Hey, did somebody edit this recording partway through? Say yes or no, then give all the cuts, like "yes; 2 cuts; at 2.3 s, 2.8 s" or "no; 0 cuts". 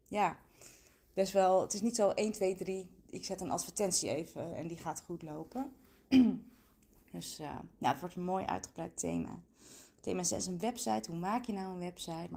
no; 0 cuts